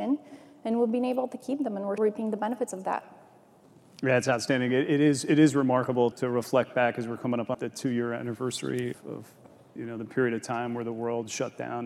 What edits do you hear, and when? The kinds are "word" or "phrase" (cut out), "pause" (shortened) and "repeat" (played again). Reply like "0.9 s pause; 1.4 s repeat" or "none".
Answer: 2.0 s word; 6.1 s word; 7.5 s word; 8.9 s word